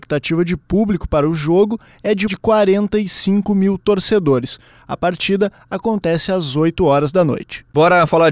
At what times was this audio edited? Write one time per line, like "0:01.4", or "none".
0:02.3